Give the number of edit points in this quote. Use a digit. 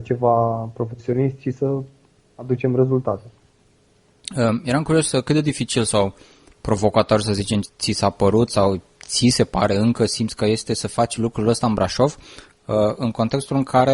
1